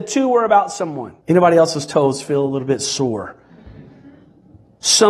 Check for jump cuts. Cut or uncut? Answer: cut